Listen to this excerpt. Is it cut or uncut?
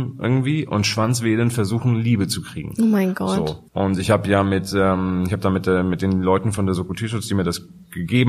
cut